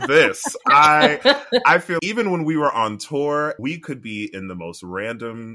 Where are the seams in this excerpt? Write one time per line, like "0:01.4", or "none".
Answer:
0:02.0
0:03.6